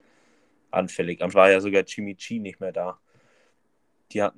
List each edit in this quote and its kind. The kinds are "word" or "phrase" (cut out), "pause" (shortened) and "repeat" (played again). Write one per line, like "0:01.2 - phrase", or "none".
0:01.3 - word